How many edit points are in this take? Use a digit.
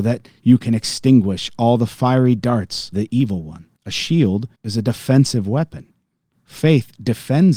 3